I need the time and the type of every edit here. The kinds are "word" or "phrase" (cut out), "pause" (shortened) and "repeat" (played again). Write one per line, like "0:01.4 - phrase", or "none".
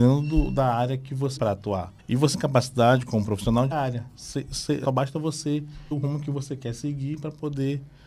0:01.4 - word
0:02.0 - pause
0:02.3 - word
0:03.7 - phrase
0:04.8 - word
0:05.9 - word